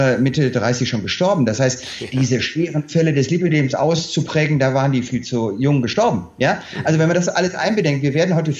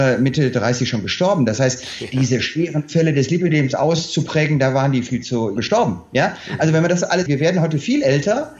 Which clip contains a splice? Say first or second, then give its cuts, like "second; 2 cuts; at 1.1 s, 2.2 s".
second; 2 cuts; at 5.6 s, 7.3 s